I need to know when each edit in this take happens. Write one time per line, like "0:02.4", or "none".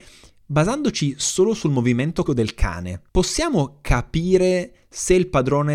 0:02.3
0:03.1